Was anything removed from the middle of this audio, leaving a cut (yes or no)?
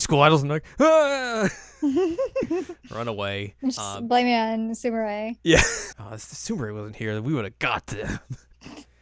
yes